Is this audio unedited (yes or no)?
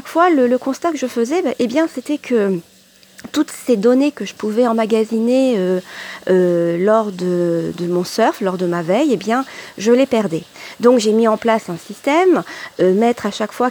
yes